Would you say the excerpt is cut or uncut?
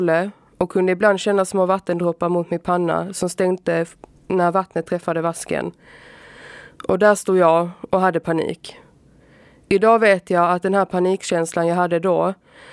uncut